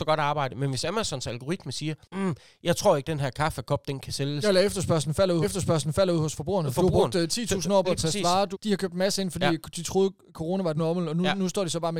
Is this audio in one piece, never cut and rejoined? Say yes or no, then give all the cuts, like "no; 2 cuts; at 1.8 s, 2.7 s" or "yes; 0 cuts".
no; 6 cuts; at 2.0 s, 3.0 s, 5.4 s, 7.8 s, 8.5 s, 10.8 s